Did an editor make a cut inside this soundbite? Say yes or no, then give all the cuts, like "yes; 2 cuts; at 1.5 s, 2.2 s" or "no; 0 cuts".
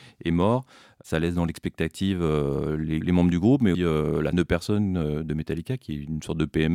yes; 3 cuts; at 3.0 s, 3.7 s, 4.3 s